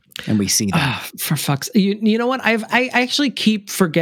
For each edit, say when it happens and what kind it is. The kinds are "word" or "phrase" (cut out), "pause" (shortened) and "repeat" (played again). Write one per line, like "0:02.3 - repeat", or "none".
none